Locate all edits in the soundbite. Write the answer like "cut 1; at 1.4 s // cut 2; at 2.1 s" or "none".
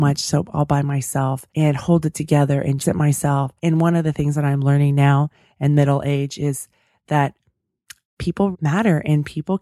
cut 1; at 1.5 s // cut 2; at 2.8 s // cut 3; at 3.6 s // cut 4; at 8.5 s